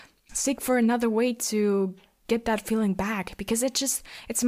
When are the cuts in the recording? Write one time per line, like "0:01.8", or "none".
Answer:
none